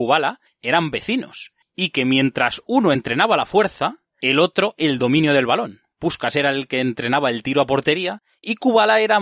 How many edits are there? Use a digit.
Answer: 0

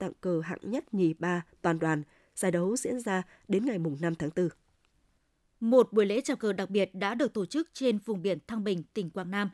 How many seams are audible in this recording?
0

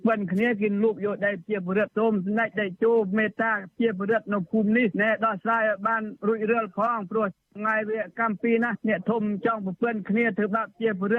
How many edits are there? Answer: 0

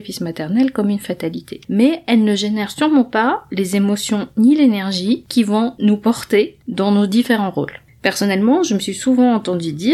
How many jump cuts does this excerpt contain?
1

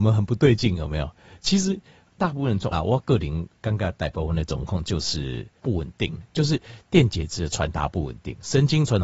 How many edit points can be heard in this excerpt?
2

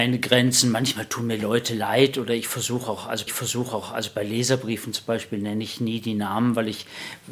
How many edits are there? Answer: 1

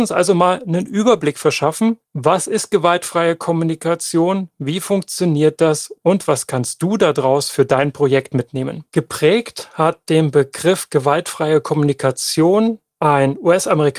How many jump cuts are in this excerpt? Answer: 2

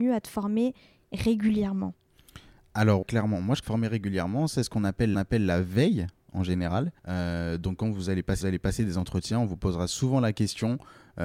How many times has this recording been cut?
5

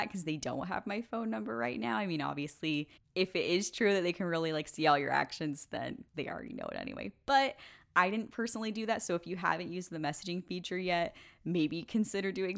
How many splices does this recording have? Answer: 2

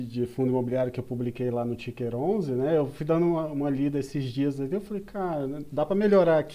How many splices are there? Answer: 0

